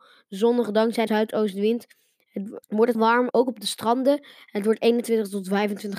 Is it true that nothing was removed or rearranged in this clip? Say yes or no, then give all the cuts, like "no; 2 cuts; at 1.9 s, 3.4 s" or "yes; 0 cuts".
no; 4 cuts; at 1.1 s, 2.6 s, 2.9 s, 3.3 s